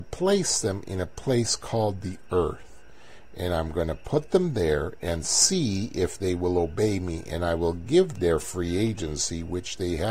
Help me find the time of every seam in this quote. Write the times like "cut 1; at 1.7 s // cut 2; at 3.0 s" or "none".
cut 1; at 8.1 s